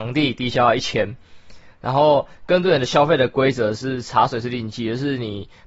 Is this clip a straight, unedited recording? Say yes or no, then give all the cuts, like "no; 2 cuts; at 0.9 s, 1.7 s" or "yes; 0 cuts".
yes; 0 cuts